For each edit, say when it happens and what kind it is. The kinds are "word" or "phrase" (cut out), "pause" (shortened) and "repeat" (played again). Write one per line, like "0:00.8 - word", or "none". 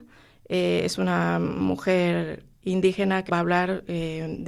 0:03.3 - word